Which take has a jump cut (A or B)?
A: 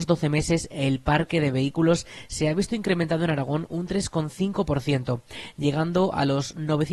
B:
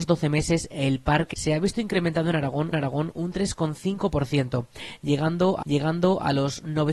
B